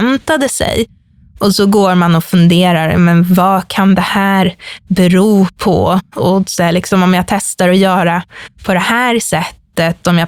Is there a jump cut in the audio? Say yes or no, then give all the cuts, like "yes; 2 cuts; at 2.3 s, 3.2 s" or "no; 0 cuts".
no; 0 cuts